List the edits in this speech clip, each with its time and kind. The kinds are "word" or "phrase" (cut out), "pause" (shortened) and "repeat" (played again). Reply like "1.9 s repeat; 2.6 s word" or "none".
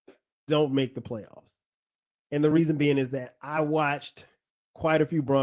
none